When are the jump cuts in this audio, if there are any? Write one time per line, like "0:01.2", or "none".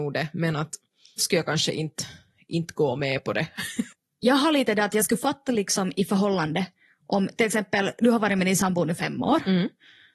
0:01.2